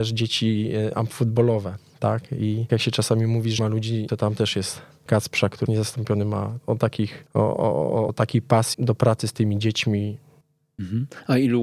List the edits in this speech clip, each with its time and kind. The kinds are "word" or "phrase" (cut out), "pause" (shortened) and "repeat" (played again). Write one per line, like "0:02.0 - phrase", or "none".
0:02.7 - word
0:03.6 - word
0:04.1 - word
0:05.1 - word
0:05.7 - word
0:06.6 - word
0:08.1 - word
0:08.7 - word

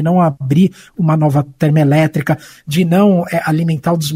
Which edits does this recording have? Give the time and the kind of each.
none

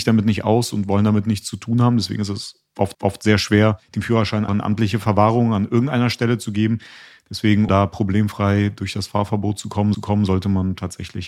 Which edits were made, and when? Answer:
0:02.9 - repeat
0:03.8 - pause
0:04.5 - word
0:07.7 - word
0:09.9 - repeat

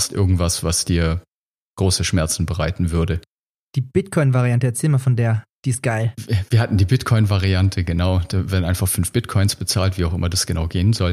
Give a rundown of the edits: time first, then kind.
none

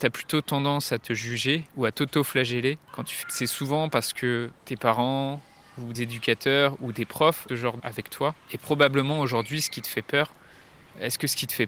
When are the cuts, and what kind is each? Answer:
0:01.7 - pause
0:02.9 - pause
0:03.2 - phrase
0:04.6 - pause
0:05.9 - word
0:07.5 - phrase
0:07.8 - word
0:08.4 - pause

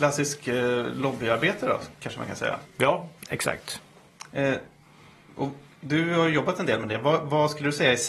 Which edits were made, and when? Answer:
0:03.2 - pause

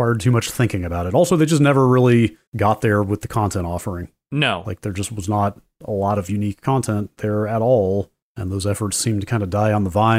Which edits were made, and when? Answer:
0:02.5 - pause
0:08.2 - pause

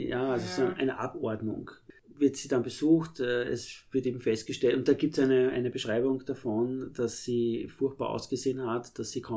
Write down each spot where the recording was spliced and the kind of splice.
none

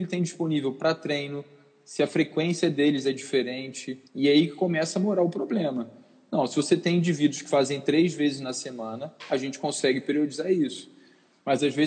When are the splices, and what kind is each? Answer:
0:04.1 - pause

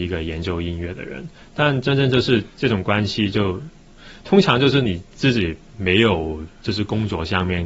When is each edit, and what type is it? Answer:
none

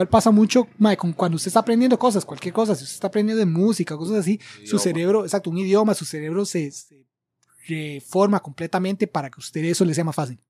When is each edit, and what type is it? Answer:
none

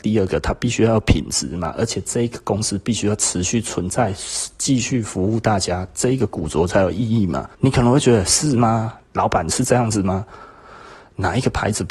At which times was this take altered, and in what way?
0:07.5 - pause
0:09.0 - pause

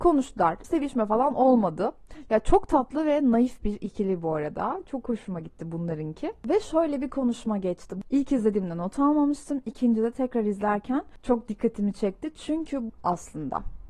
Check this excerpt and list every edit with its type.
0:12.9 - phrase

